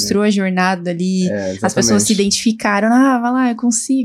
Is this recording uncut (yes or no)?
yes